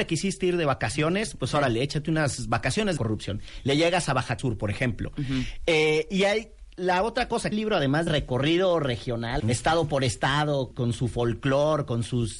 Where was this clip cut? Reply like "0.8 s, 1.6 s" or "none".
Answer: 3.0 s, 4.4 s, 7.5 s, 8.1 s, 9.4 s, 10.7 s